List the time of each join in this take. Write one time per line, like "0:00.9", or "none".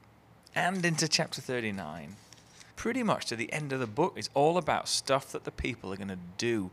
0:02.7
0:04.1